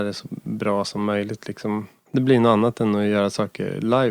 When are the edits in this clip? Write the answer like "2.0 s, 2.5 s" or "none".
none